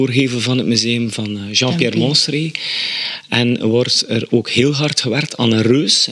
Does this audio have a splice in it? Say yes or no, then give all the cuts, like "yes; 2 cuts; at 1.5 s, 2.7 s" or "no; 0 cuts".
no; 0 cuts